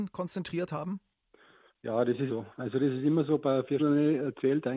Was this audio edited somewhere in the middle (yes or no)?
yes